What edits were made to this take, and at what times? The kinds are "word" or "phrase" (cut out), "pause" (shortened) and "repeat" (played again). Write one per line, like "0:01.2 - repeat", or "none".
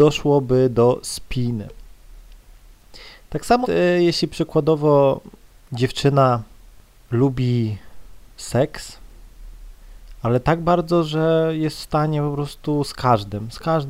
0:03.6 - word